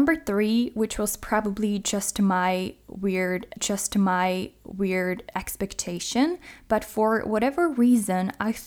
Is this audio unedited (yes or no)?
no